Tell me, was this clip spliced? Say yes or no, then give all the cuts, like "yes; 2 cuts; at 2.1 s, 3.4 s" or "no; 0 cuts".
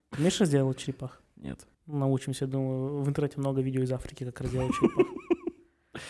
yes; 1 cut; at 1.7 s